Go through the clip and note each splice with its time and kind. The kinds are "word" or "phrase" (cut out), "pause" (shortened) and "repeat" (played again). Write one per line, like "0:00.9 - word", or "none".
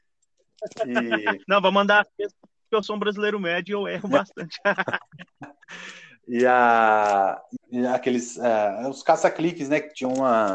0:01.4 - pause
0:02.1 - pause
0:07.6 - word